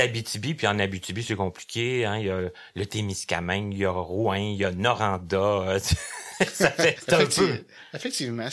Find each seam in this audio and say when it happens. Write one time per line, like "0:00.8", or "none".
0:07.0